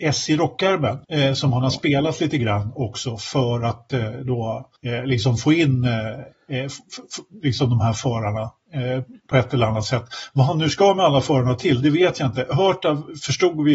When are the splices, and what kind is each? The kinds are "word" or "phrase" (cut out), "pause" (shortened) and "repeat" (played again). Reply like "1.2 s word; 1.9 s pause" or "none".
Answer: 1.0 s pause; 4.8 s pause; 6.3 s pause